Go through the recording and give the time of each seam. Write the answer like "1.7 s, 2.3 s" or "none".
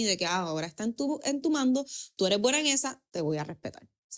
none

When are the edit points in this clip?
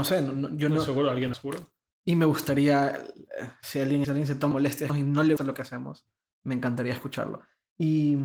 1.3 s, 4.0 s, 4.5 s, 4.9 s, 5.4 s

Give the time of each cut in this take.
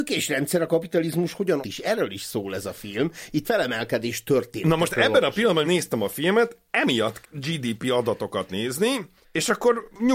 1.6 s, 3.4 s, 5.6 s, 7.2 s

